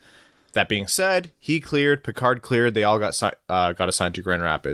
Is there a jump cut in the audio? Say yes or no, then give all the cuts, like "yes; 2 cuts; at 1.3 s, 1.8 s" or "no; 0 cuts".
no; 0 cuts